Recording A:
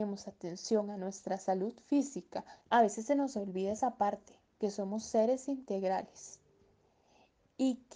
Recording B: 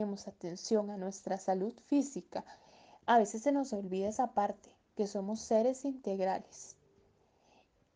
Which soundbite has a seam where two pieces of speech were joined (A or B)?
A